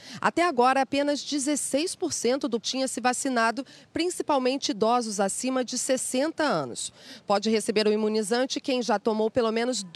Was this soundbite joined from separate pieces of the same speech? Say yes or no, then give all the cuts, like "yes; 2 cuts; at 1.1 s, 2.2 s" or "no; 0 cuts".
yes; 1 cut; at 2.6 s